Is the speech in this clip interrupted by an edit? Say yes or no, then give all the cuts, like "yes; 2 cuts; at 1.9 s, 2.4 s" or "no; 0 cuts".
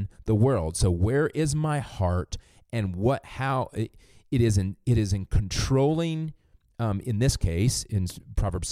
no; 0 cuts